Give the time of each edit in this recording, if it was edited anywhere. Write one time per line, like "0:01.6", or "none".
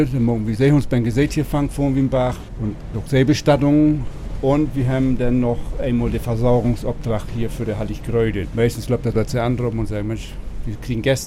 0:09.1